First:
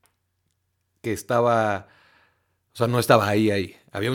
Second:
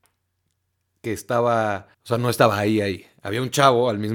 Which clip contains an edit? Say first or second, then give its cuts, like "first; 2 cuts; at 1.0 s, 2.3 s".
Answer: second; 1 cut; at 1.9 s